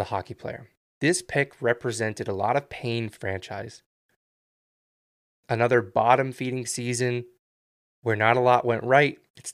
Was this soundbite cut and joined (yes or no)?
yes